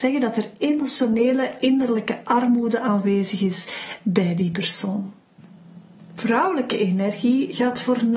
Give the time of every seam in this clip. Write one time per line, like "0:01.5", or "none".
none